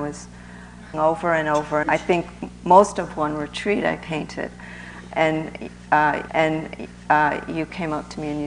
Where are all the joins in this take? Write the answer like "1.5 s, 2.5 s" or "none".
0.9 s, 1.8 s, 6.3 s